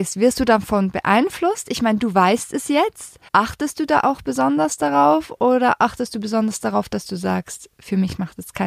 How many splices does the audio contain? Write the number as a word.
one